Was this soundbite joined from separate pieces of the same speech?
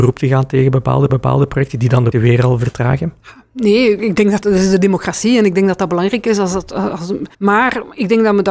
yes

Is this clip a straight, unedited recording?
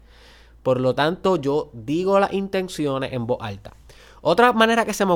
yes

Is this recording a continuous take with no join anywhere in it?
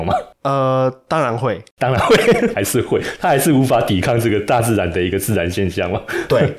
no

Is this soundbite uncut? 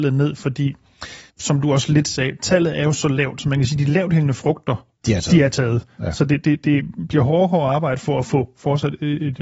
no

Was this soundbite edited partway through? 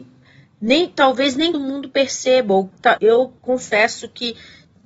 yes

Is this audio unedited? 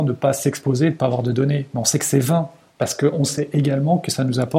yes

